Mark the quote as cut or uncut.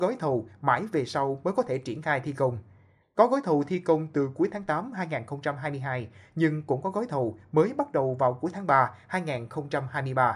uncut